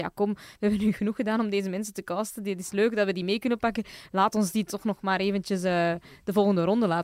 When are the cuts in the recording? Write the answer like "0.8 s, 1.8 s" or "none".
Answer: none